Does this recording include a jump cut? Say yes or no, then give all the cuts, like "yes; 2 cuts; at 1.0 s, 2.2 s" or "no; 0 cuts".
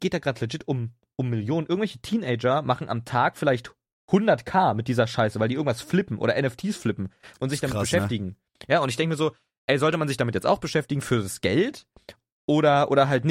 no; 0 cuts